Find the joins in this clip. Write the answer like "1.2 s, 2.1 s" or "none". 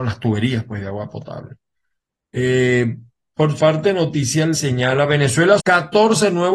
3.6 s, 4.5 s, 5.6 s